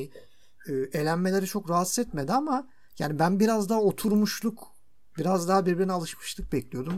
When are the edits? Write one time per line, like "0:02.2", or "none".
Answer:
none